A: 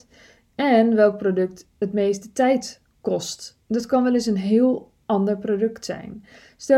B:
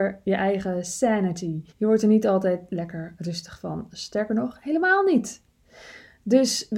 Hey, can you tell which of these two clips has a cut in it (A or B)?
B